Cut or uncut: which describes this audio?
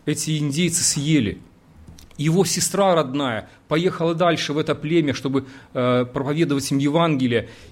uncut